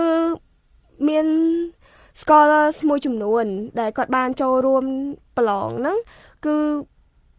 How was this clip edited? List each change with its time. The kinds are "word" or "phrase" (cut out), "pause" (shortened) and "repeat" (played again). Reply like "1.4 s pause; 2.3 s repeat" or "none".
none